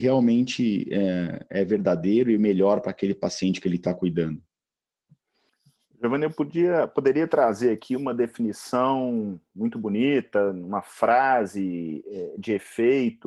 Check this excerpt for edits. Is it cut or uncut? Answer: uncut